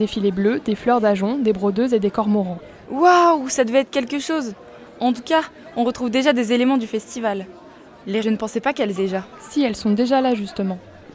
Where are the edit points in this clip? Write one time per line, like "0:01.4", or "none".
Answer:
0:08.2
0:09.0